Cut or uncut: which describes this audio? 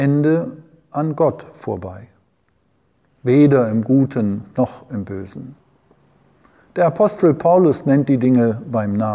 uncut